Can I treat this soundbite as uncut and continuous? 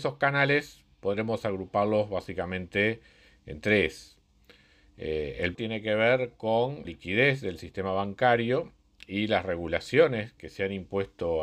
no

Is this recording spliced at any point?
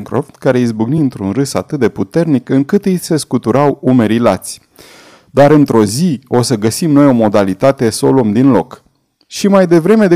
no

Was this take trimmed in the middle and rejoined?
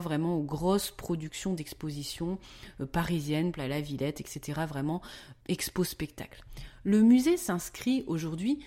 yes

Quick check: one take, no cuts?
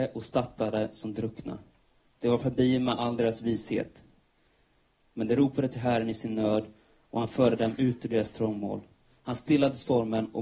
yes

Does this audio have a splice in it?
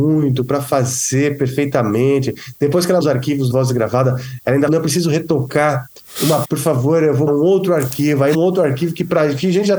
yes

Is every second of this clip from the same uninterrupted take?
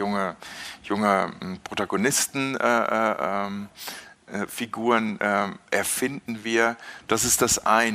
yes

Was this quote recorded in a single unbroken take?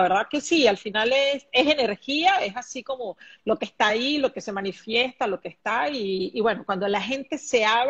yes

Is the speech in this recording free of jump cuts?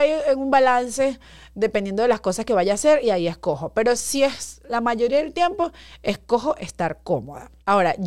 yes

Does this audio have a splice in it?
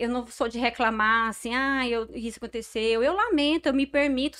no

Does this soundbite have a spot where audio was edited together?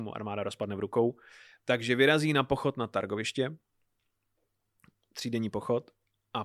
no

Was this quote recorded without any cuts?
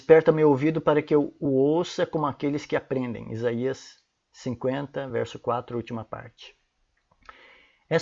yes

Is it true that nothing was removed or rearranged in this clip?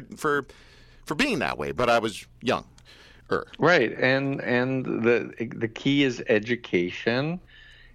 yes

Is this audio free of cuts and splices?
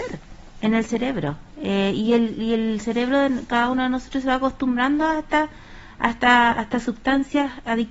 yes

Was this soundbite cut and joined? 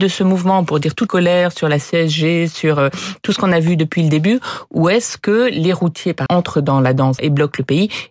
yes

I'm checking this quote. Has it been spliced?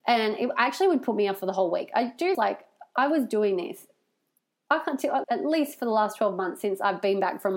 yes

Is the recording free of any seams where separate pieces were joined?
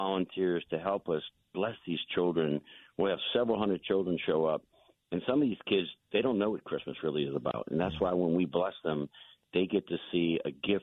yes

